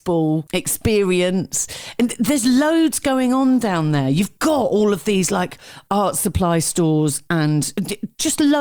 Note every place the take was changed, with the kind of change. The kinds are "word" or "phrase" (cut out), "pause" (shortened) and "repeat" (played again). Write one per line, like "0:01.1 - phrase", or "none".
none